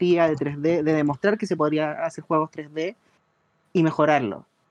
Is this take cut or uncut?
uncut